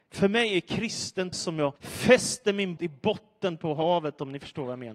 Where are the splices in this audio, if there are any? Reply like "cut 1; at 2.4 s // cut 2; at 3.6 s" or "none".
cut 1; at 1.3 s // cut 2; at 1.8 s // cut 3; at 2.8 s